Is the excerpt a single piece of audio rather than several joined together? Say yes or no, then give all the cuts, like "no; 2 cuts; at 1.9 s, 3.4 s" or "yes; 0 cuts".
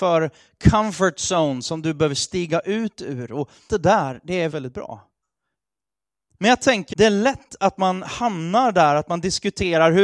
no; 3 cuts; at 3.7 s, 4.5 s, 6.9 s